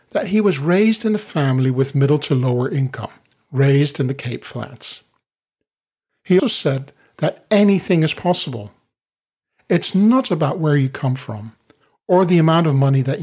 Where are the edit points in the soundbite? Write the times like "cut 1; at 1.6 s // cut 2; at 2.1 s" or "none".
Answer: cut 1; at 6.4 s